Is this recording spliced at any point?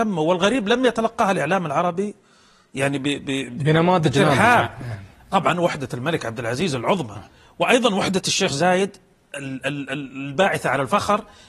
no; 0 cuts

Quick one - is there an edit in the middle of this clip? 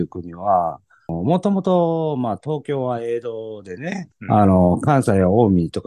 yes; 1 cut; at 4.1 s

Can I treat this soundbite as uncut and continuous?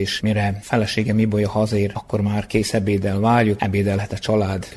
no; 1 cut; at 3.6 s

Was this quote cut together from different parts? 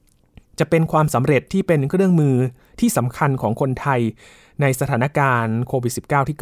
no; 0 cuts

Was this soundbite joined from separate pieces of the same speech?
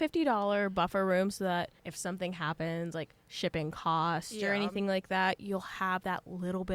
yes; 1 cut; at 1.8 s

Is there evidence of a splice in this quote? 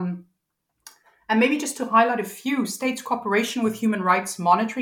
no; 0 cuts

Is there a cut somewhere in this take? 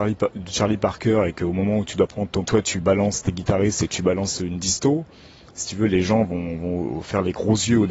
yes; 1 cut; at 2.4 s

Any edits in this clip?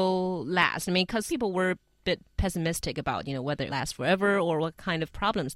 yes; 2 cuts; at 1.3 s, 3.7 s

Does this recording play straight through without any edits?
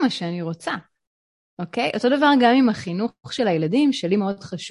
yes; 0 cuts

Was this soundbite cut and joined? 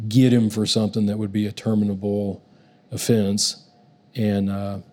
no; 0 cuts

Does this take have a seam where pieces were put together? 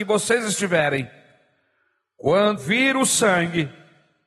yes; 1 cut; at 2.6 s

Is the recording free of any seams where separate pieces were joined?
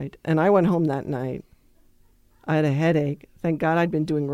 yes; 0 cuts

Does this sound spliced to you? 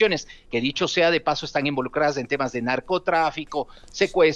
no; 0 cuts

